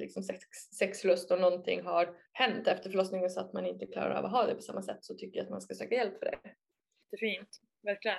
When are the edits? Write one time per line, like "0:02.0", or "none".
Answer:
0:02.3

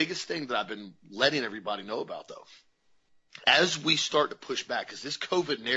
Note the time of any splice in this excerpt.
0:02.3

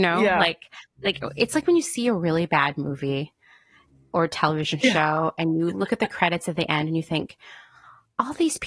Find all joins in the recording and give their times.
none

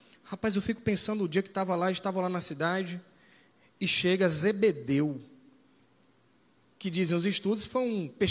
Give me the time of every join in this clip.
none

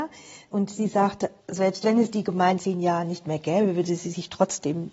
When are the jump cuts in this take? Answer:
0:02.6

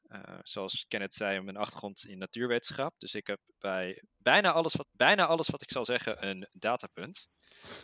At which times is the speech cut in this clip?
0:04.8

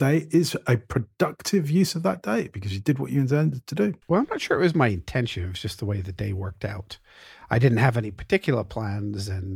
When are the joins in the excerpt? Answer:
0:04.0

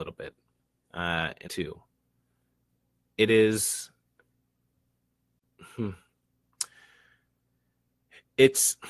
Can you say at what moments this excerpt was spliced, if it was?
0:01.4
0:03.3

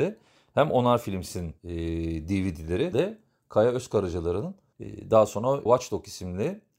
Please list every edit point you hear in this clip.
0:01.6
0:02.9
0:05.7

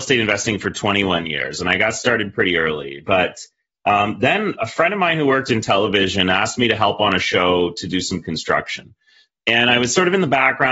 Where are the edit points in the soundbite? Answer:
none

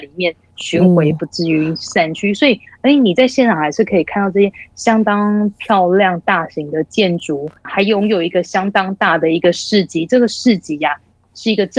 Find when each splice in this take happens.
0:07.6

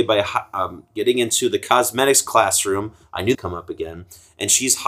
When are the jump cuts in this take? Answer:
0:03.3

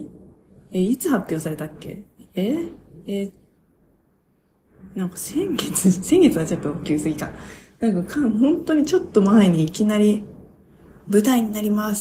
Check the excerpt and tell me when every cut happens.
0:02.2

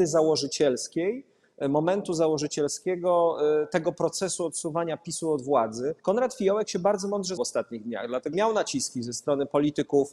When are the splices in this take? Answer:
0:06.0
0:07.4
0:08.3

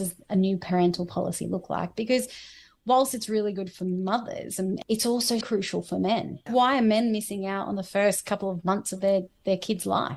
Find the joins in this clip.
0:05.4
0:06.5

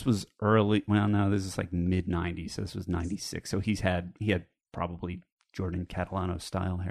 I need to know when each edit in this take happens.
none

